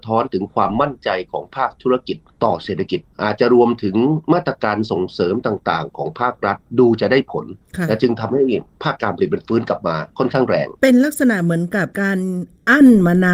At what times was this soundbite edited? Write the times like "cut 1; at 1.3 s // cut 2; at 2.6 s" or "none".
cut 1; at 10.8 s // cut 2; at 11.9 s